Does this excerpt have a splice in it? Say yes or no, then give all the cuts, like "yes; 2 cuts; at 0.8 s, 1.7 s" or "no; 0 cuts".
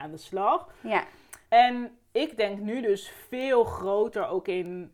yes; 1 cut; at 1.4 s